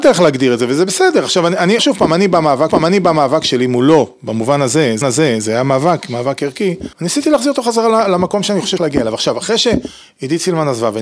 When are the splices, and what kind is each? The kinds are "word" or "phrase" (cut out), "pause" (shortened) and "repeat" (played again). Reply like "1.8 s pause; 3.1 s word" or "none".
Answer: 1.8 s phrase; 2.7 s repeat; 5.0 s repeat; 6.9 s pause; 8.8 s word